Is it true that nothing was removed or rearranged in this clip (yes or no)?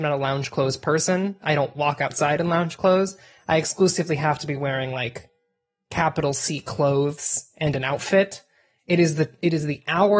yes